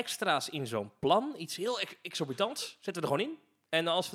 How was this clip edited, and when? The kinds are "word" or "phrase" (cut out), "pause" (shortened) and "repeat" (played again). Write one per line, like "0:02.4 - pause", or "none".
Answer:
none